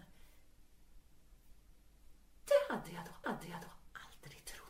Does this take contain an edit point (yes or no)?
yes